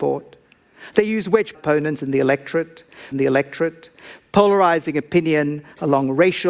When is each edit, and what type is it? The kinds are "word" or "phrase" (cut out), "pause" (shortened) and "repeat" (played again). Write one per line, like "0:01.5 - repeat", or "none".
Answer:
0:01.5 - phrase
0:03.1 - repeat